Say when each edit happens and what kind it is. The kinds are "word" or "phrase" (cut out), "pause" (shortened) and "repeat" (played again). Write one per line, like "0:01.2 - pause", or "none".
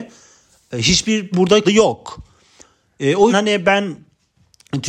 0:01.3 - word
0:01.6 - word
0:03.3 - word